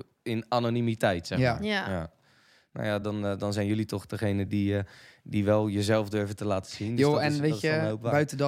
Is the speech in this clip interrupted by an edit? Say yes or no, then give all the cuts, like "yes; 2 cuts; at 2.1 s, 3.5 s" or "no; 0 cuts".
no; 0 cuts